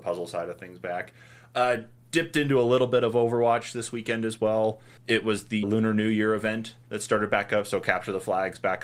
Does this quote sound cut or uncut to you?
cut